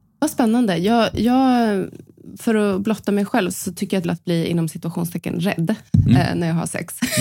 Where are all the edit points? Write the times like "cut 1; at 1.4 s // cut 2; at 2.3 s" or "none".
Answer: cut 1; at 3.5 s // cut 2; at 4.0 s